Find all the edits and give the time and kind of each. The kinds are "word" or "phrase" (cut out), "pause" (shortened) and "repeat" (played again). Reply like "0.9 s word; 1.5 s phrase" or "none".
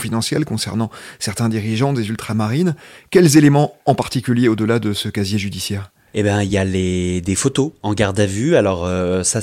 none